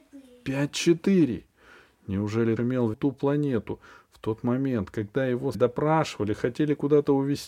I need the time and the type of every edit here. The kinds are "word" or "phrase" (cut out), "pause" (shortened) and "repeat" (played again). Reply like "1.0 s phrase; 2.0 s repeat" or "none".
2.6 s word; 2.9 s word; 5.5 s word